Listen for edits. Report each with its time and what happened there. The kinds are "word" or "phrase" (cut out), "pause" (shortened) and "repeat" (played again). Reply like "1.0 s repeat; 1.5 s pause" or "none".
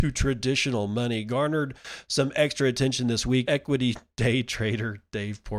3.5 s word